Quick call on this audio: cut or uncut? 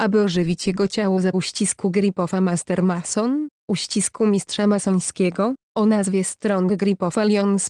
cut